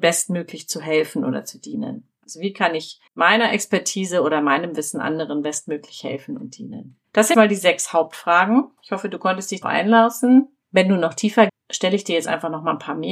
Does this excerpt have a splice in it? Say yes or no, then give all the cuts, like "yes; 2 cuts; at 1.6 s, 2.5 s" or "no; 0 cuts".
yes; 5 cuts; at 3.1 s, 7.3 s, 8.8 s, 9.6 s, 11.5 s